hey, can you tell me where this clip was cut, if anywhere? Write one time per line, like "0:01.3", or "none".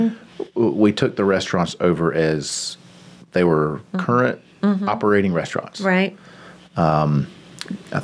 none